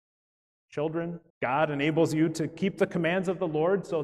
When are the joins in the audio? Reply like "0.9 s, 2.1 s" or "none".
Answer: 1.3 s